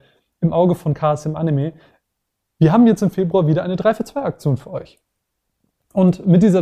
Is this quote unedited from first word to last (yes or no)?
yes